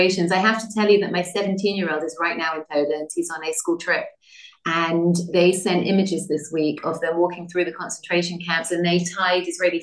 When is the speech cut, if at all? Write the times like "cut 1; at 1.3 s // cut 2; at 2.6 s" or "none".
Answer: none